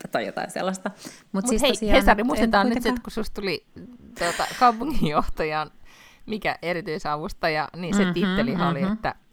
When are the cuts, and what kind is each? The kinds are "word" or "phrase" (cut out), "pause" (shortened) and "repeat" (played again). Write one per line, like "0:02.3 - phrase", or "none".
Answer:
none

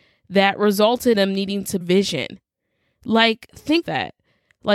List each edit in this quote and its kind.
0:01.1 - word
0:01.8 - phrase
0:03.8 - word

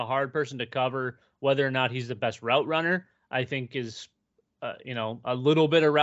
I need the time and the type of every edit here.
none

